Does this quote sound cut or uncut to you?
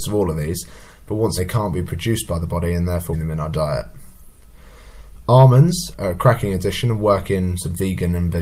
cut